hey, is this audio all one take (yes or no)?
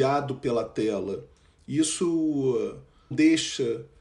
no